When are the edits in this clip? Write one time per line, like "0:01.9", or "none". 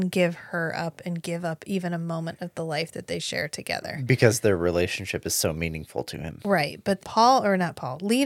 0:07.0